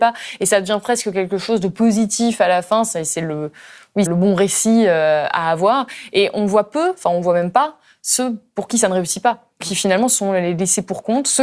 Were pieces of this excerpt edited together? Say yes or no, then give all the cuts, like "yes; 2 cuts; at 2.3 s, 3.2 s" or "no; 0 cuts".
yes; 2 cuts; at 4.1 s, 9.6 s